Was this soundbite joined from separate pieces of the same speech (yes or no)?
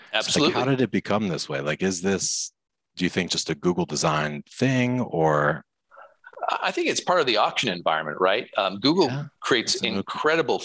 no